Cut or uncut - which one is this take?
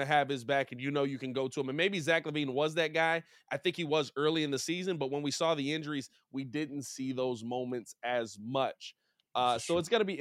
uncut